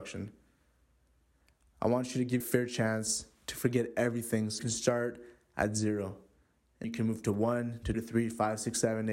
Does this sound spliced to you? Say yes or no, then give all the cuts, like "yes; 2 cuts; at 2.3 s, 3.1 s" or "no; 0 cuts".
yes; 4 cuts; at 2.4 s, 4.6 s, 6.8 s, 7.9 s